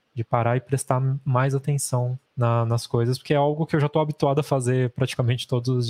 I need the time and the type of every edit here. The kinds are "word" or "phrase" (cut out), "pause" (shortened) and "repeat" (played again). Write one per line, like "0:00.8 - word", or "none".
0:02.3 - pause

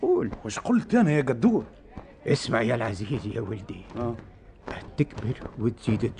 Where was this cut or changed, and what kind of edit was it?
0:04.9 - word

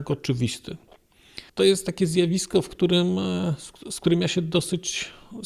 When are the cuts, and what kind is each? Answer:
0:01.5 - pause

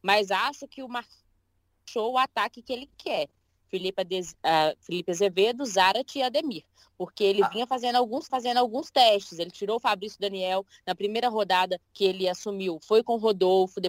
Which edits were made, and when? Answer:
0:08.3 - repeat
0:11.8 - pause

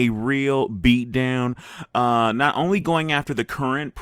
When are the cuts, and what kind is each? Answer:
none

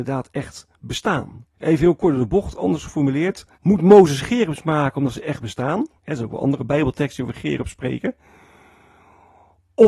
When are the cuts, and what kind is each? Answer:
0:01.5 - pause
0:03.5 - pause
0:06.0 - pause

